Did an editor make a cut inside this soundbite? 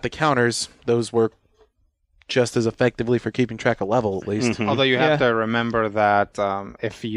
no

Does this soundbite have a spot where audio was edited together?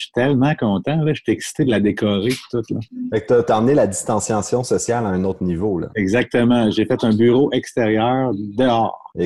no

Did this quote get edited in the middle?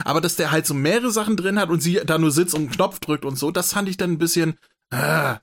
no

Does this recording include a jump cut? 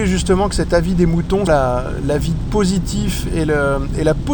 yes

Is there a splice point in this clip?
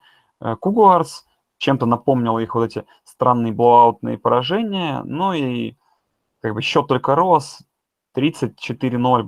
no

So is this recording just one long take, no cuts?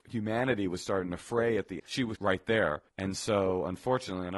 no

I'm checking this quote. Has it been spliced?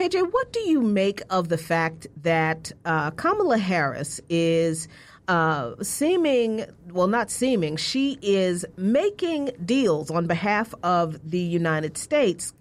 no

